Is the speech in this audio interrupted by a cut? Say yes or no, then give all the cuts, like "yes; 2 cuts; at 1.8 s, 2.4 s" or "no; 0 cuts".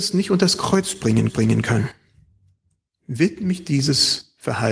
yes; 1 cut; at 1.3 s